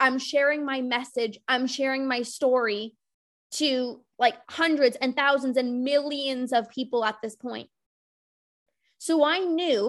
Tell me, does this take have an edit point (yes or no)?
no